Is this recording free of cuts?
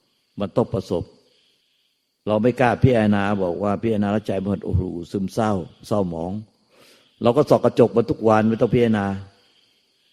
no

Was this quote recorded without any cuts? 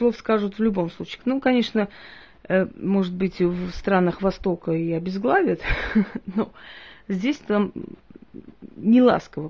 yes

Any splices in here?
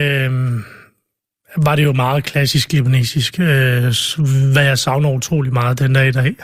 no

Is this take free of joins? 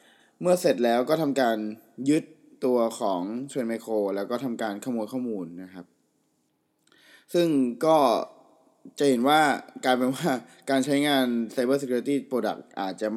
yes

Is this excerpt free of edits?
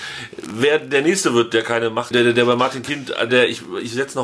no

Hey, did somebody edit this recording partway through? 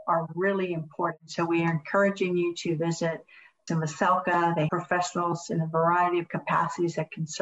yes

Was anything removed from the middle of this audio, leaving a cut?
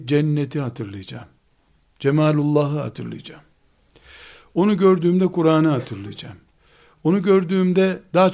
no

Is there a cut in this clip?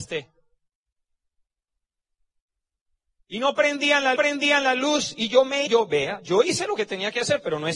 yes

